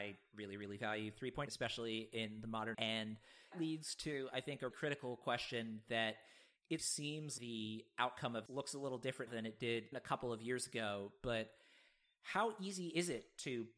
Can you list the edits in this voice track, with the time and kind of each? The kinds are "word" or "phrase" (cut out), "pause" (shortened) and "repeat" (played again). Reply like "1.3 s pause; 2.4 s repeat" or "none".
1.5 s word; 2.7 s word; 3.5 s word; 4.7 s word; 6.8 s word; 7.4 s word; 8.5 s word; 9.3 s word; 9.9 s word